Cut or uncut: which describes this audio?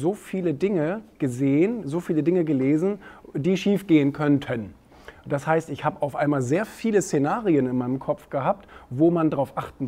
uncut